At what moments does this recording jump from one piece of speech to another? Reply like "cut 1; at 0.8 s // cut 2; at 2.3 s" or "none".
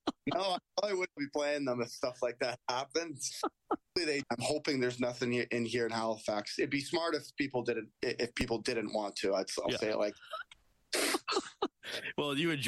cut 1; at 1.2 s // cut 2; at 3.3 s // cut 3; at 4.2 s // cut 4; at 7.9 s